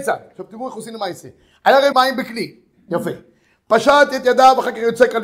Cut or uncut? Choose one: cut